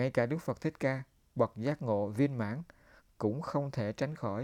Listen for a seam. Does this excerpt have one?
no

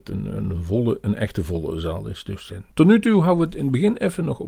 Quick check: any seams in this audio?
yes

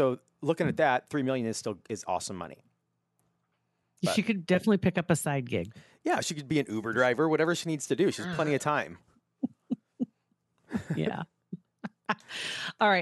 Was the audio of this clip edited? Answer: no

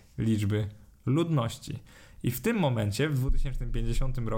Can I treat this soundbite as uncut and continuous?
yes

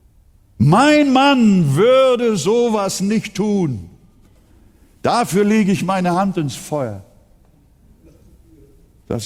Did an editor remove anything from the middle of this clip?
no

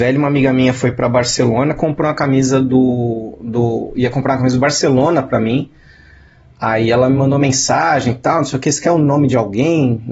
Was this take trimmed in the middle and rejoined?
no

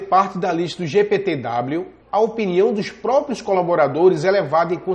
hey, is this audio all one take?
no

